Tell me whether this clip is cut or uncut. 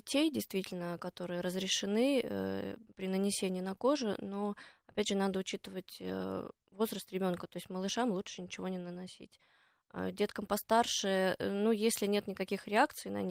uncut